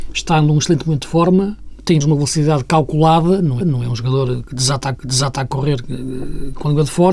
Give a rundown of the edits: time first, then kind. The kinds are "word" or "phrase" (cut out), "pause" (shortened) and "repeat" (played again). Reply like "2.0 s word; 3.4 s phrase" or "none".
2.0 s phrase; 3.6 s repeat; 5.0 s repeat